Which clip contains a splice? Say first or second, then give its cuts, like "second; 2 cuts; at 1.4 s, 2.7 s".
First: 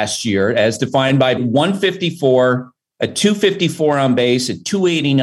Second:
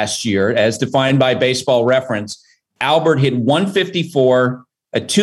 first; 1 cut; at 1.4 s